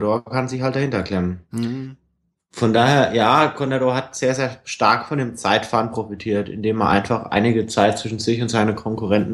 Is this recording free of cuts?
yes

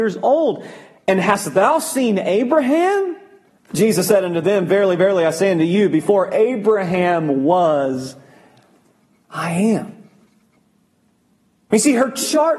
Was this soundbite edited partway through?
yes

